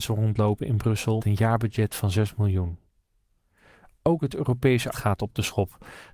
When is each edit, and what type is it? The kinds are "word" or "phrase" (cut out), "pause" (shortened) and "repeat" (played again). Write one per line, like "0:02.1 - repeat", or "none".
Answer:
0:01.2 - word
0:04.9 - word